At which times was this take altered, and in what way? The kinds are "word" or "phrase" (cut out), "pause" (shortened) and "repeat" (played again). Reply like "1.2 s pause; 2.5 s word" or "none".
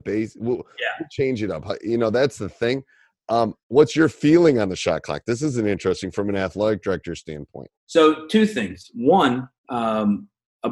3.6 s pause; 7.8 s pause; 9.6 s pause